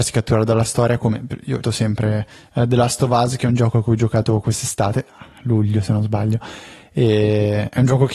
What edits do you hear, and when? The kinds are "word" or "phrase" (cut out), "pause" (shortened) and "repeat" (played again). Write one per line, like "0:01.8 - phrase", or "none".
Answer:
0:01.6 - word